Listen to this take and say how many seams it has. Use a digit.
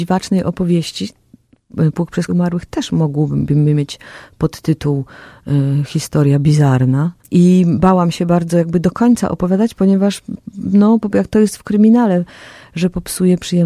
3